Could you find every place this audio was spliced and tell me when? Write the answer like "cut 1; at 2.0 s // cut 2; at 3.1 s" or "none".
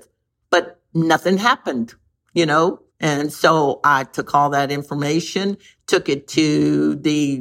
cut 1; at 2.9 s